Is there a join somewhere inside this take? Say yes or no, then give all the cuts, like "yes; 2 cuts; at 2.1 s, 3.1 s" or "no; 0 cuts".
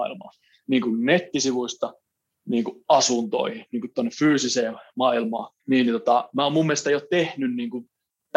yes; 1 cut; at 5.6 s